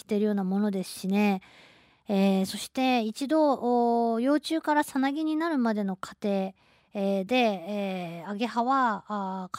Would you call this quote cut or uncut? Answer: uncut